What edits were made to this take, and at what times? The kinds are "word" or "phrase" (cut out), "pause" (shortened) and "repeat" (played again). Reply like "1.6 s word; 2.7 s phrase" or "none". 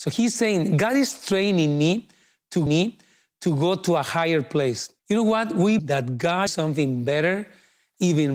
2.7 s repeat; 5.0 s pause; 5.8 s word; 6.5 s phrase